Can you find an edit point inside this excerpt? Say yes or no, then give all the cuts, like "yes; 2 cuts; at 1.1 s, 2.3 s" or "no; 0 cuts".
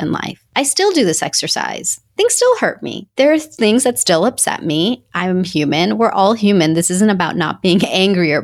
no; 0 cuts